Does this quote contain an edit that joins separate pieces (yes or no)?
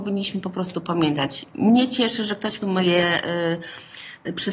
yes